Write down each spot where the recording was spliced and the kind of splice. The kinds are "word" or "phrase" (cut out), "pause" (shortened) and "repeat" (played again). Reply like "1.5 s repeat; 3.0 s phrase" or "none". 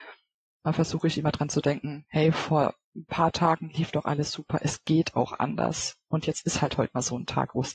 none